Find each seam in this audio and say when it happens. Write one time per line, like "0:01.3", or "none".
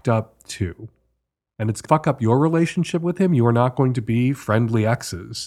0:01.9